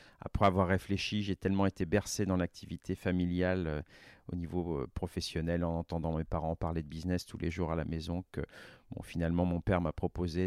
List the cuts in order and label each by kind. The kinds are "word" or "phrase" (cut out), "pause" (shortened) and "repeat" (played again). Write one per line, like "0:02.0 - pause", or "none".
none